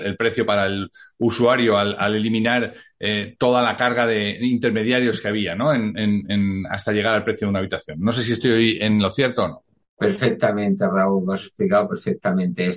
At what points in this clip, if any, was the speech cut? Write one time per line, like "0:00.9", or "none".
0:09.8